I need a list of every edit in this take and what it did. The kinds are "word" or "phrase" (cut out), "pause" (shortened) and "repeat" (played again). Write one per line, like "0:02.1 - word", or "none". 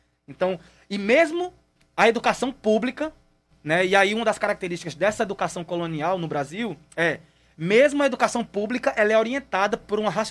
none